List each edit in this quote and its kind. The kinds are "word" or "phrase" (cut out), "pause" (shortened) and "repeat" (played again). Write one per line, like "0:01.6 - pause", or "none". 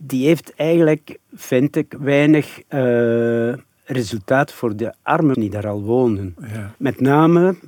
0:01.2 - pause
0:04.5 - word
0:05.3 - word
0:06.7 - pause